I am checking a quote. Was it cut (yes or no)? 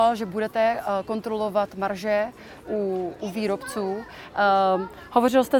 no